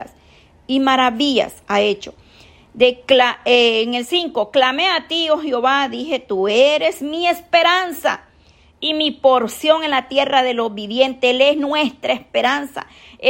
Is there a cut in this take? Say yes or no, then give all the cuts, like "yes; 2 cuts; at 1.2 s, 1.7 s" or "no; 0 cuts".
no; 0 cuts